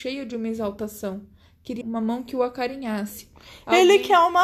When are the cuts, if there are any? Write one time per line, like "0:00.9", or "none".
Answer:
0:01.8